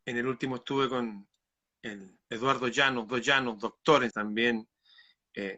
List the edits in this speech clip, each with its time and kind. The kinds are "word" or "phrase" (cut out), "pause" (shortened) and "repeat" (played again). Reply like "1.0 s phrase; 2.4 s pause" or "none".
2.2 s pause; 3.1 s repeat; 4.1 s word